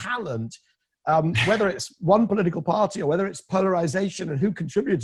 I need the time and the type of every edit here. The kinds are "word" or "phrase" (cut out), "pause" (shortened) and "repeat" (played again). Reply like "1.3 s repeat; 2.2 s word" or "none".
none